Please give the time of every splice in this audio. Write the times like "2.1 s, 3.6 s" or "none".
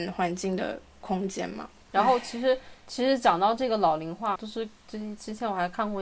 4.4 s

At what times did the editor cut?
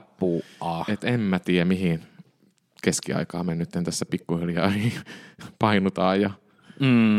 2.5 s

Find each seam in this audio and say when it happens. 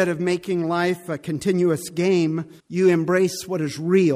2.6 s

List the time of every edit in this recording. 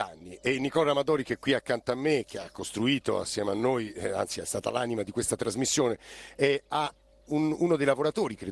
none

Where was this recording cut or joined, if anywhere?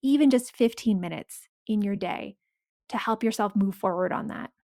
none

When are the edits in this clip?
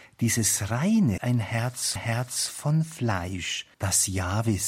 1.2 s, 2.0 s, 3.7 s

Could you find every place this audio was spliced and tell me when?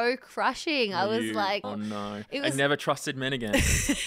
1.6 s

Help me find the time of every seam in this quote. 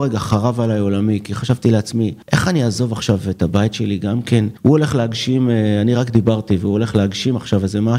2.2 s, 4.6 s

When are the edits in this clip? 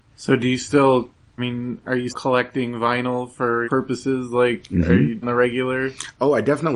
1.4 s, 2.1 s, 3.6 s, 5.2 s

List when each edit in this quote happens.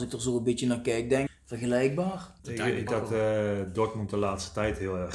1.3 s, 2.4 s, 2.9 s

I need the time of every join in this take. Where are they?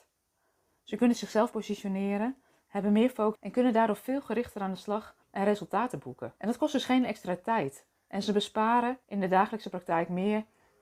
1.5 s, 3.3 s, 5.2 s, 6.4 s, 9.0 s

